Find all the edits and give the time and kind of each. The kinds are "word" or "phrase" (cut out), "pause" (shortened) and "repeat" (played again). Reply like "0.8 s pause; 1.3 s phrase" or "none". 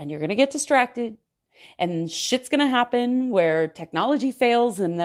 none